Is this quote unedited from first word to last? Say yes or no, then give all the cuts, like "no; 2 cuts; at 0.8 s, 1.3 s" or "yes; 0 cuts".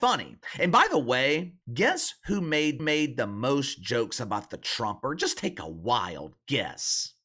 no; 2 cuts; at 1.6 s, 2.8 s